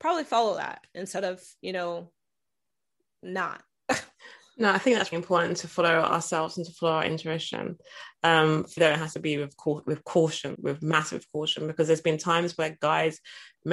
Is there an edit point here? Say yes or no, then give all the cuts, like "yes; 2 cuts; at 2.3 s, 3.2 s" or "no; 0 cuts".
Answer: yes; 4 cuts; at 5.1 s, 8.8 s, 9.8 s, 10.5 s